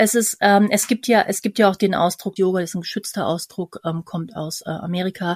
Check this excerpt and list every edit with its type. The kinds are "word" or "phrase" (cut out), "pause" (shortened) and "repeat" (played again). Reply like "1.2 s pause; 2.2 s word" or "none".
2.4 s word